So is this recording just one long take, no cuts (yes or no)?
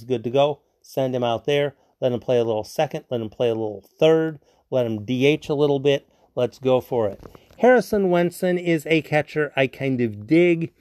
yes